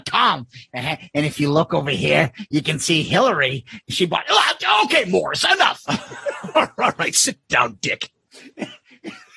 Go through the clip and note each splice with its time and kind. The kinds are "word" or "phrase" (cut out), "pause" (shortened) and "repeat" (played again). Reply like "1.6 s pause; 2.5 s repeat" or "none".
none